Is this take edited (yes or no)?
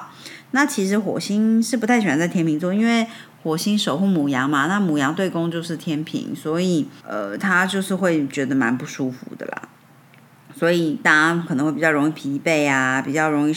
yes